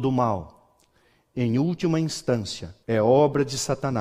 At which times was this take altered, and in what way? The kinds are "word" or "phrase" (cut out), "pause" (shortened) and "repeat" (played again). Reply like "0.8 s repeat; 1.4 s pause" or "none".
2.8 s pause

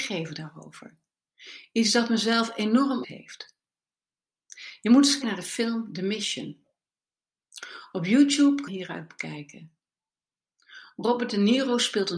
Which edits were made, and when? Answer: 3.0 s word; 5.2 s word; 8.7 s phrase

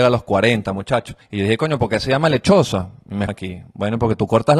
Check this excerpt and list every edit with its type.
1.2 s pause; 3.3 s word

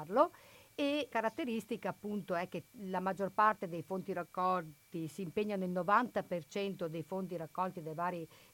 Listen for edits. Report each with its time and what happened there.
1.1 s phrase

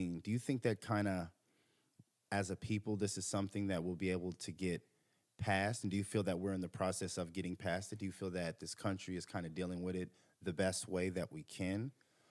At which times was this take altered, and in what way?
none

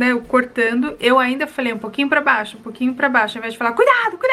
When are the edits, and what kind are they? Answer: none

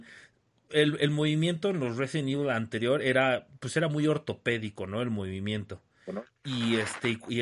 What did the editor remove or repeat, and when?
none

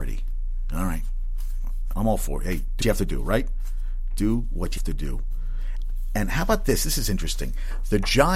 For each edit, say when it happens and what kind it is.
1.9 s word; 2.8 s word; 4.8 s phrase

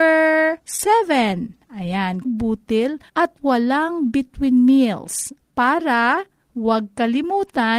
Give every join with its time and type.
2.2 s phrase; 3.1 s pause

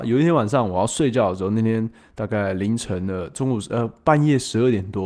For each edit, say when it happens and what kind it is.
none

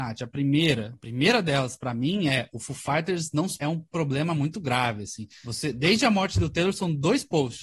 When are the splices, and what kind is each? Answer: 3.6 s word

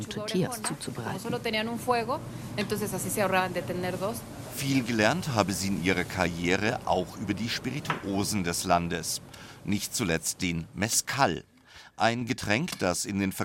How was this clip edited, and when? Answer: none

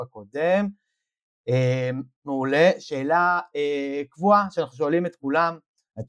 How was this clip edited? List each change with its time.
none

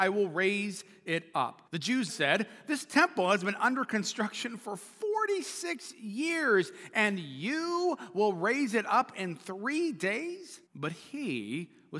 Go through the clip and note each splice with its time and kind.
1.7 s pause; 2.1 s word; 10.7 s pause

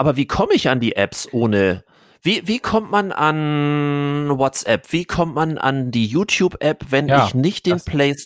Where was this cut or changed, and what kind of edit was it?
none

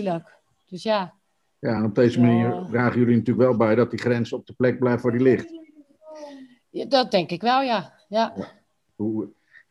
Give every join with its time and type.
none

